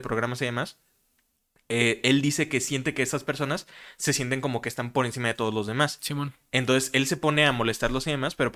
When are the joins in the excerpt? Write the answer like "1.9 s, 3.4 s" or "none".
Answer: none